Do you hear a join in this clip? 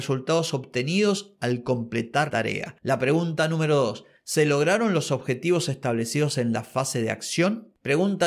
yes; 1 cut; at 2.3 s

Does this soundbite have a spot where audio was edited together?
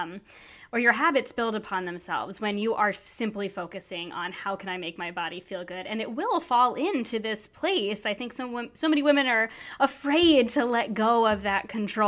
no; 0 cuts

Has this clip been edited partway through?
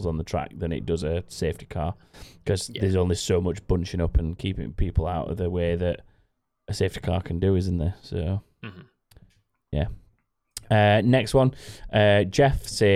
no; 0 cuts

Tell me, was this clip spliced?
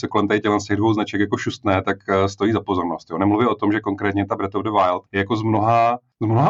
yes; 1 cut; at 5.1 s

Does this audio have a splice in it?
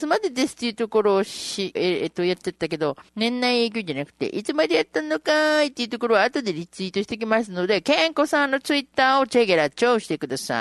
yes; 2 cuts; at 1.7 s, 3.1 s

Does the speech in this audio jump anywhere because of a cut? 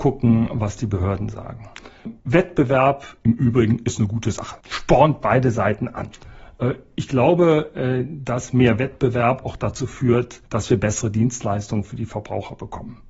yes; 1 cut; at 10.5 s

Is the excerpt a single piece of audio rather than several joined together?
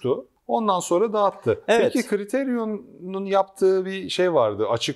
yes; 0 cuts

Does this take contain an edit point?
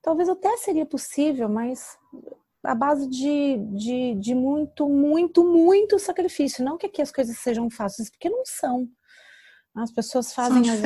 no; 0 cuts

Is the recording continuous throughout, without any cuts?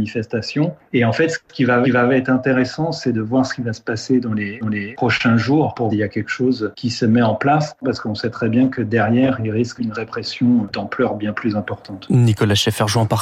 no; 4 cuts; at 1.8 s, 4.6 s, 5.9 s, 9.8 s

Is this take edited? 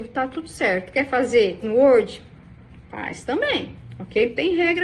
yes; 1 cut; at 1.6 s

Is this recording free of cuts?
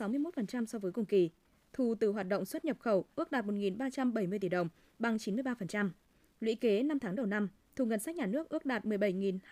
yes; 0 cuts

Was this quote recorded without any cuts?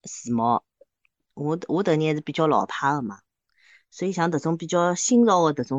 yes; 0 cuts

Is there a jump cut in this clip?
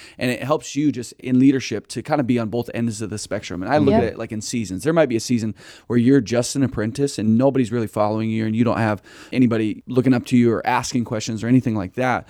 no; 0 cuts

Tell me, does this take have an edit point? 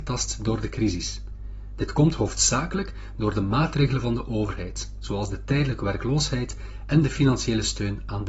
no; 0 cuts

